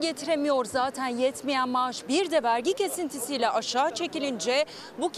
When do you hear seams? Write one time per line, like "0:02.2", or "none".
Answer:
none

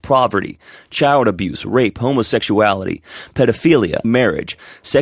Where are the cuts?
0:04.0

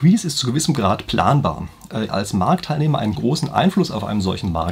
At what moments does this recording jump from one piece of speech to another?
0:02.1
0:03.2

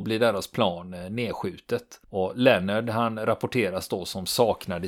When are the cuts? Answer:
0:02.0

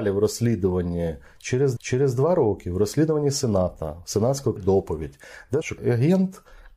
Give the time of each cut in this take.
0:01.8
0:04.6
0:05.6

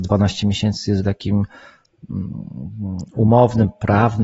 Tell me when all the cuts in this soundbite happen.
0:01.0

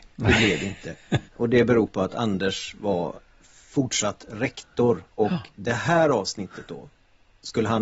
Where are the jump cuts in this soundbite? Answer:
0:01.3
0:05.1
0:05.5

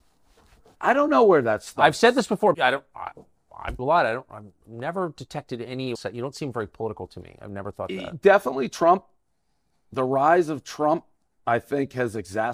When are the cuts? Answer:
0:02.5
0:03.8
0:05.9

